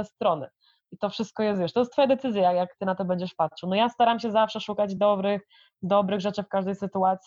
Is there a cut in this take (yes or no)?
no